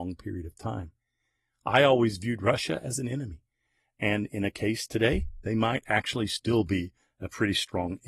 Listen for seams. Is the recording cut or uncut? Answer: uncut